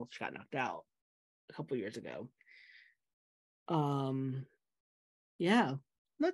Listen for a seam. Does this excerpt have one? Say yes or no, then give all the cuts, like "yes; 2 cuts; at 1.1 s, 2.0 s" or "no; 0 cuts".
no; 0 cuts